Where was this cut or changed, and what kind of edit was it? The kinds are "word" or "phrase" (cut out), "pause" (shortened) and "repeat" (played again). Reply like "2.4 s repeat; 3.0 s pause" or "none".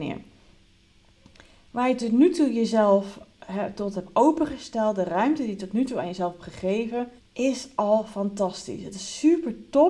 7.2 s pause